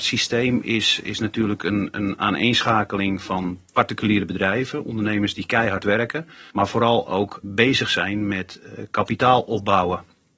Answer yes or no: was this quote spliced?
yes